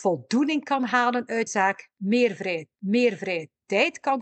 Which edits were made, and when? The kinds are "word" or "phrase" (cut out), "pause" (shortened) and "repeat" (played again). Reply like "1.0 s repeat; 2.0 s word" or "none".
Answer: 1.5 s word; 2.8 s repeat

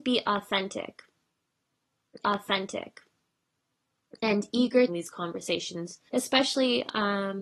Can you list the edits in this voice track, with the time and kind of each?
2.2 s repeat; 4.9 s phrase; 6.1 s pause

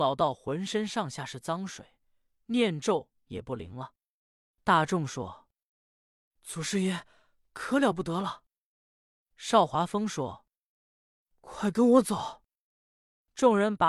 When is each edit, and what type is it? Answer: none

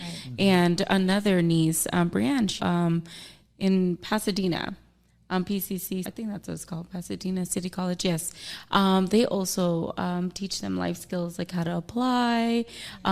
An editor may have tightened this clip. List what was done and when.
2.6 s word; 6.0 s word

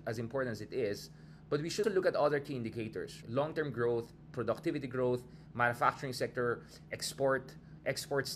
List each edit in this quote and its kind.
1.8 s word; 3.2 s word

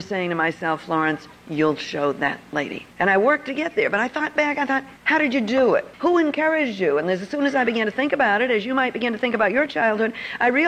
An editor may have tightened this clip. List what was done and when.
2.9 s pause; 5.0 s pause; 5.9 s pause

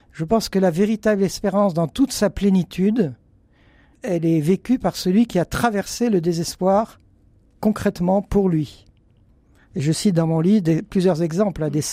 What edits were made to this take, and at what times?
none

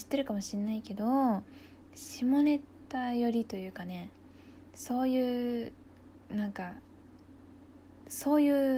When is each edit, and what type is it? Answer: 6.2 s pause

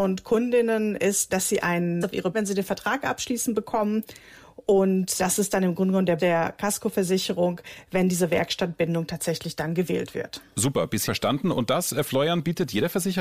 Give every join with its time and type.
1.3 s word; 2.0 s word; 2.3 s word; 5.2 s word; 6.2 s word; 11.1 s word

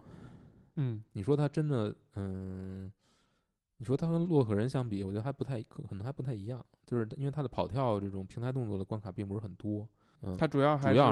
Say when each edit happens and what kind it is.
10.2 s word

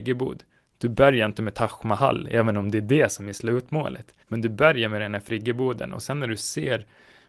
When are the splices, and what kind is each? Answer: 4.2 s pause

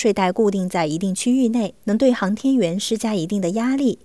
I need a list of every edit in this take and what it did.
1.8 s pause

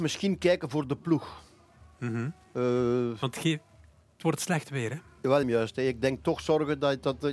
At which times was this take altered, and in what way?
5.4 s phrase

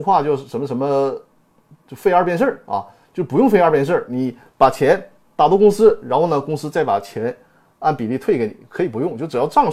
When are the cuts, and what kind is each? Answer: 1.5 s pause

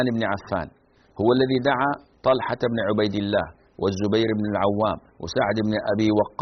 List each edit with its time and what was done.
none

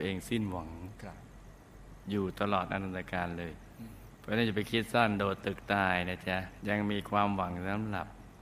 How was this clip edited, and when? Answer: 6.6 s pause

